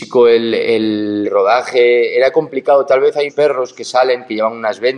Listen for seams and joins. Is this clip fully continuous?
no; 2 cuts; at 1.2 s, 3.3 s

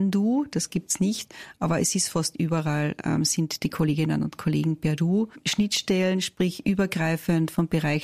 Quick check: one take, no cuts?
yes; 0 cuts

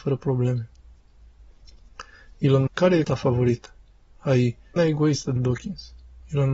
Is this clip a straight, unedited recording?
no; 4 cuts; at 2.7 s, 3.0 s, 4.8 s, 5.4 s

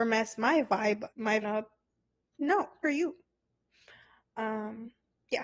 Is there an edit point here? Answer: yes; 3 cuts; at 1.1 s, 1.4 s, 2.8 s

